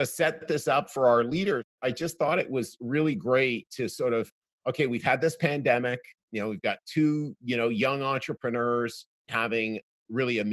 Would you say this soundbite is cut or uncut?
uncut